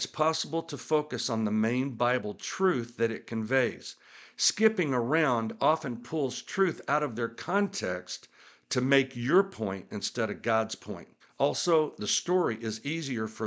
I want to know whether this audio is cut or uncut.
cut